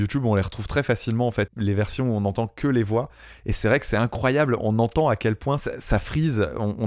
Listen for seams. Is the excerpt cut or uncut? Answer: cut